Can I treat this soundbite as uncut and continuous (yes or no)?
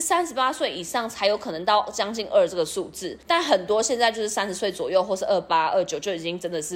no